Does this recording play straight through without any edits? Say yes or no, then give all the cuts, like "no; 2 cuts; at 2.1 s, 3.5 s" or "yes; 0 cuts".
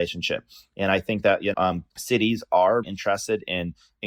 no; 3 cuts; at 1.5 s, 1.9 s, 2.8 s